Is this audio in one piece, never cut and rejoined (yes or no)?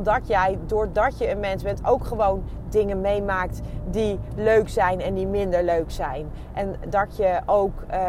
yes